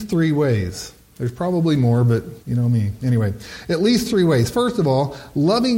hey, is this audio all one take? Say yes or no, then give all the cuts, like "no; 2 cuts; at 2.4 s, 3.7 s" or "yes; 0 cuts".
no; 1 cut; at 2.4 s